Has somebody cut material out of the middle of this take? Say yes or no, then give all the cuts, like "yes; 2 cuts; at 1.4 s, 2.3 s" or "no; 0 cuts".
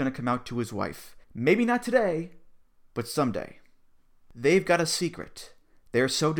yes; 1 cut; at 1.2 s